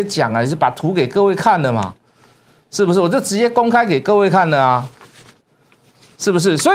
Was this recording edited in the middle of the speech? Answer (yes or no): no